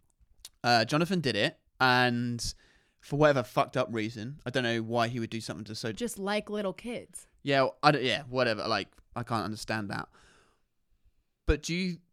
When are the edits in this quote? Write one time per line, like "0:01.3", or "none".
0:01.7
0:05.9